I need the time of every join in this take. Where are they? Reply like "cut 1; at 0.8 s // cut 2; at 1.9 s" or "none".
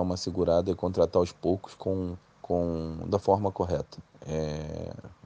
cut 1; at 2.2 s // cut 2; at 4.1 s